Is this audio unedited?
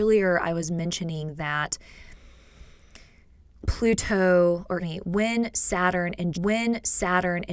no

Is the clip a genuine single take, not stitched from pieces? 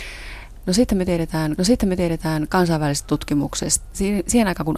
no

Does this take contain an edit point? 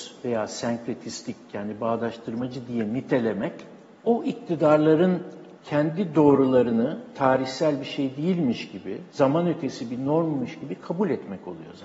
yes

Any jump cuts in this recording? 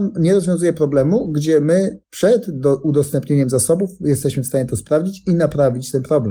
yes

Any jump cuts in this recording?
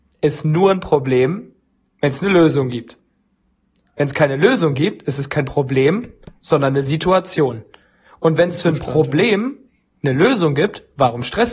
no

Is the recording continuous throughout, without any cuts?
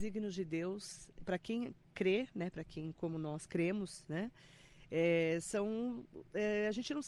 no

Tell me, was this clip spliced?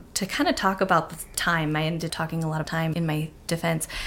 yes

